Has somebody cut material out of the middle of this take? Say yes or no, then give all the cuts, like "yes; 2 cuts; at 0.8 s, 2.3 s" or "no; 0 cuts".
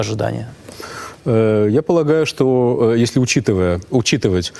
no; 0 cuts